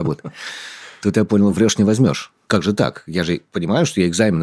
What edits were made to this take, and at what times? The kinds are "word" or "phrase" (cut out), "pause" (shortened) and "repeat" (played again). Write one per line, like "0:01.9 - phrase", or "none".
none